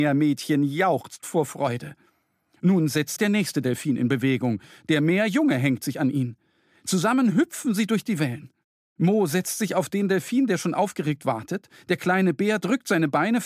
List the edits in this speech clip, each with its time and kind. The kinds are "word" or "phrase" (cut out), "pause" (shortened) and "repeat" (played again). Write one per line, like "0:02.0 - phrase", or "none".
0:03.2 - word

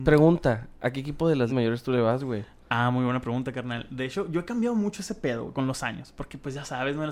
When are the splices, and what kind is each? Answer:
0:01.5 - word

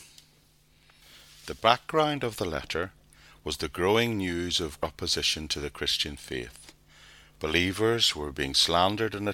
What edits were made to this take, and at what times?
none

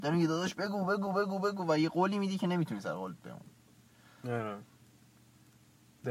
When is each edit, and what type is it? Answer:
none

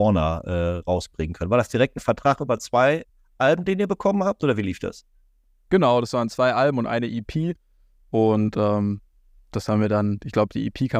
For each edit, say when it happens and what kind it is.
none

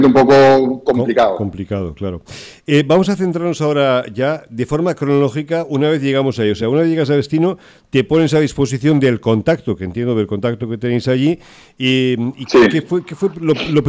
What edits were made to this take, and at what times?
none

